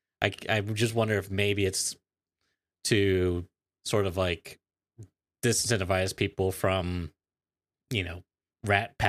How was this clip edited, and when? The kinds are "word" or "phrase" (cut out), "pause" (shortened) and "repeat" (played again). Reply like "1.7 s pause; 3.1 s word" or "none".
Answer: none